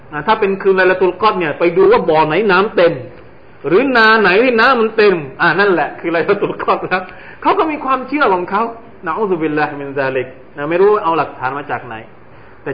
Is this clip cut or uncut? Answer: uncut